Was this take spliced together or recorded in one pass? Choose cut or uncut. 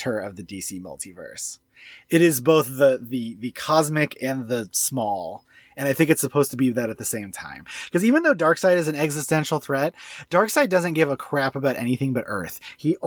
uncut